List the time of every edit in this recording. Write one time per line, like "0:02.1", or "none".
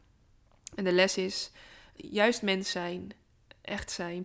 0:02.0